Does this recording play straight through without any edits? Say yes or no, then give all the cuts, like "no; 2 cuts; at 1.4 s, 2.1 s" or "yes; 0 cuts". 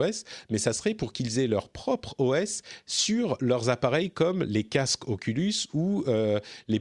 yes; 0 cuts